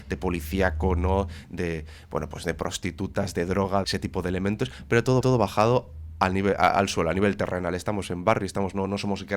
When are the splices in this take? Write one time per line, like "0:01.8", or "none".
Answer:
0:03.8
0:05.2